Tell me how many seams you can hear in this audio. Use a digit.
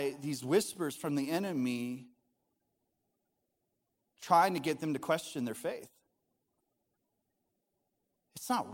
0